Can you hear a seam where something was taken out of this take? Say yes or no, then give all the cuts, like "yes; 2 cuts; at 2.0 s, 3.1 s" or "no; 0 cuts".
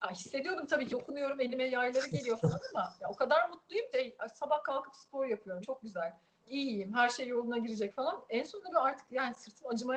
yes; 4 cuts; at 0.9 s, 3.9 s, 5.6 s, 6.4 s